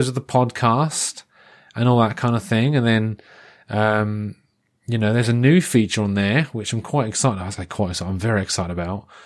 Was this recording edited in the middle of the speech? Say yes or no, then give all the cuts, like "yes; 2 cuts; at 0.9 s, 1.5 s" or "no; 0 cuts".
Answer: no; 0 cuts